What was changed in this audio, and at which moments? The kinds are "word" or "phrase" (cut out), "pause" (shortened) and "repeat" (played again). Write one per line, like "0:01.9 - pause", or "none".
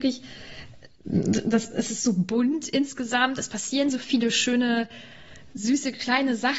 none